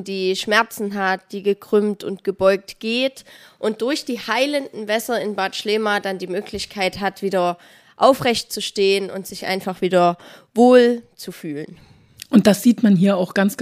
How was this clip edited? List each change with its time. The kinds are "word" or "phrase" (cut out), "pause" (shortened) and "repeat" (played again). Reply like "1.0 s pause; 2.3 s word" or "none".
none